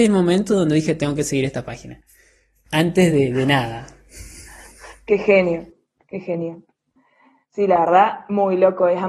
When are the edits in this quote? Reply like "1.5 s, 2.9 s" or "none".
none